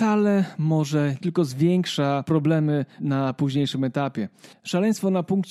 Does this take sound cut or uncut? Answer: cut